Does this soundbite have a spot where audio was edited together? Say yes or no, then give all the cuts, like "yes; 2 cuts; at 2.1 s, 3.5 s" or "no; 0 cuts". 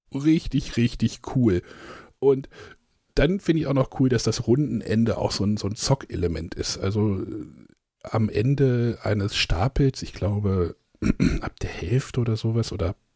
no; 0 cuts